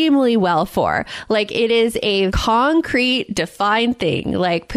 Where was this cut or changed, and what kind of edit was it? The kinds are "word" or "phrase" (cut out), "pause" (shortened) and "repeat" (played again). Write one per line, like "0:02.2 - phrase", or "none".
0:02.3 - word